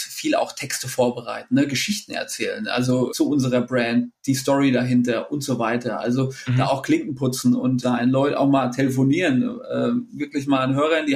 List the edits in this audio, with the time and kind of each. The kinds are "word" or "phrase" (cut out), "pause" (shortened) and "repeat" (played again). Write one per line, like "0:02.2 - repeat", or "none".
0:03.1 - word
0:07.8 - phrase